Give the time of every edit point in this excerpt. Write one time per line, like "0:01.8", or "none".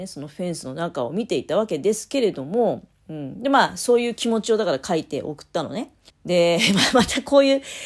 0:06.1